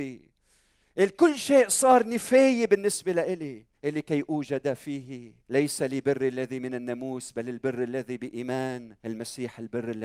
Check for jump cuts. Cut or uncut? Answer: cut